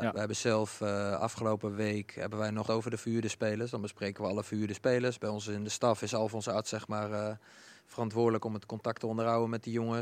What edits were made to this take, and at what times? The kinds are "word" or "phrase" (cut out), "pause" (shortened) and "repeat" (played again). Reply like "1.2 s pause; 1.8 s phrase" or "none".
2.7 s phrase